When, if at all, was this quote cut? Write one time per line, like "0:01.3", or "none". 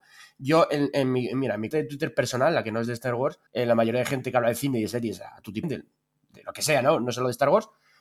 0:01.7
0:03.5
0:05.6